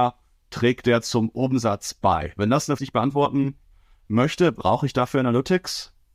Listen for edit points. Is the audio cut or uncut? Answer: cut